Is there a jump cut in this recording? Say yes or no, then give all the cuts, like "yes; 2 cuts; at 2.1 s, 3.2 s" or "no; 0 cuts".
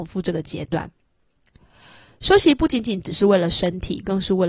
no; 0 cuts